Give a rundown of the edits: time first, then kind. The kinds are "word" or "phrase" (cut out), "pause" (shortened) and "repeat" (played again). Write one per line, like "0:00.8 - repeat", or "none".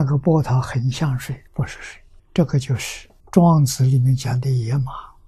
0:01.5 - pause
0:02.2 - pause
0:03.2 - pause